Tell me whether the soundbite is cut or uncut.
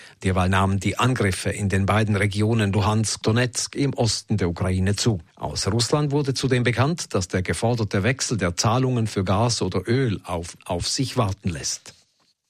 cut